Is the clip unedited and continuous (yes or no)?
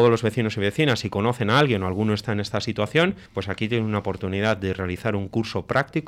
no